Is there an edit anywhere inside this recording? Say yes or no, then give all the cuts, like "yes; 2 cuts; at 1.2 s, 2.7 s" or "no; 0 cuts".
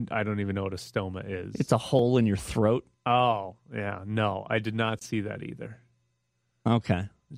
no; 0 cuts